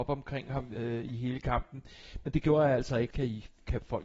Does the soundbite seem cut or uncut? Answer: cut